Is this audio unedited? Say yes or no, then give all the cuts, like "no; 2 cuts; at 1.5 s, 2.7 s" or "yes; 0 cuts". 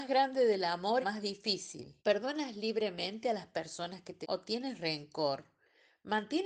no; 3 cuts; at 1.0 s, 2.0 s, 4.2 s